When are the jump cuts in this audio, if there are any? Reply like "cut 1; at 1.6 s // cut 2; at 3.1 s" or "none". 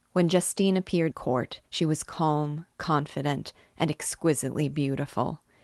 cut 1; at 1.1 s // cut 2; at 1.6 s